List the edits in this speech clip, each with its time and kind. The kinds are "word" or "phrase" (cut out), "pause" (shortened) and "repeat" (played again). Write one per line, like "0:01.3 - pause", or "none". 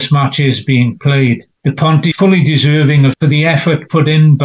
0:01.6 - pause
0:02.1 - word
0:03.1 - phrase